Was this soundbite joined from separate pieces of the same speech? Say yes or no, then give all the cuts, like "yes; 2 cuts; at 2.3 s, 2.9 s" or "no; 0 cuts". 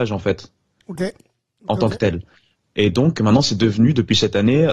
no; 0 cuts